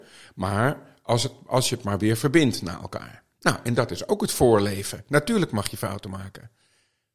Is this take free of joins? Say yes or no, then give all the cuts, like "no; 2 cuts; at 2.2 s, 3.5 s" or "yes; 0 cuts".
yes; 0 cuts